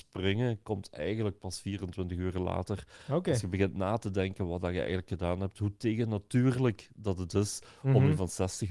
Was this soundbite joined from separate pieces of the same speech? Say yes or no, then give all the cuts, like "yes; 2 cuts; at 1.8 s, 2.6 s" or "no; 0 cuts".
no; 0 cuts